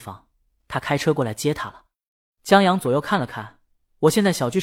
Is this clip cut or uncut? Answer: uncut